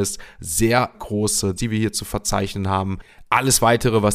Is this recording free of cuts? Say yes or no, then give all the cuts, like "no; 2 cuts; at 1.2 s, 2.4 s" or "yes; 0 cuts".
no; 2 cuts; at 0.9 s, 1.6 s